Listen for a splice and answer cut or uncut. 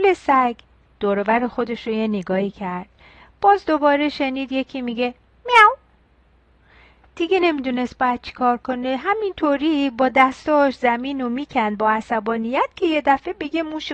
uncut